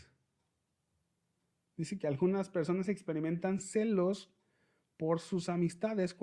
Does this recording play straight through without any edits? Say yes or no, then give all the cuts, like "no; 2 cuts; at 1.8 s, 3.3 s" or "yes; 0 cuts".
yes; 0 cuts